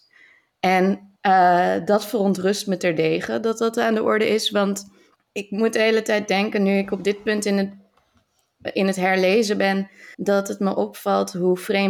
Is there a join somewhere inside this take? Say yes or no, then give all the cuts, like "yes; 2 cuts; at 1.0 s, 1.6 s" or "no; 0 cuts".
yes; 3 cuts; at 1.2 s, 5.2 s, 10.1 s